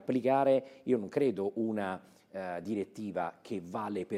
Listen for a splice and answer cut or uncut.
uncut